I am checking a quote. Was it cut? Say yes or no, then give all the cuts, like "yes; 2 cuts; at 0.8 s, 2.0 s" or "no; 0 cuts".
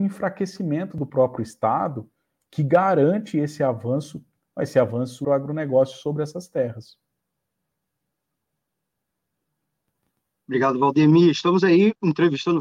yes; 1 cut; at 5.2 s